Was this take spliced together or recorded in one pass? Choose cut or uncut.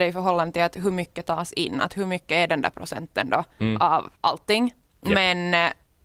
cut